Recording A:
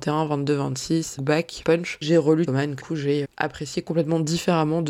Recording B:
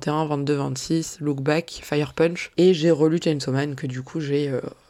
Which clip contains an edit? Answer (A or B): A